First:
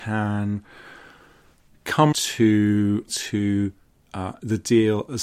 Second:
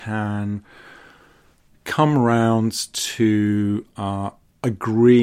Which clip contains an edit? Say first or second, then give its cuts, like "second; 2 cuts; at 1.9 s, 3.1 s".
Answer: first; 2 cuts; at 2.1 s, 3.1 s